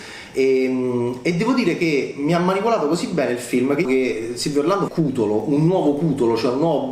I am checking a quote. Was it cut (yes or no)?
yes